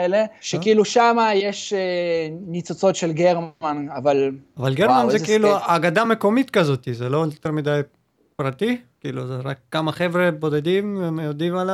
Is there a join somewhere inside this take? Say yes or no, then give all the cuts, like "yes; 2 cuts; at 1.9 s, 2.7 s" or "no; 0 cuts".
no; 0 cuts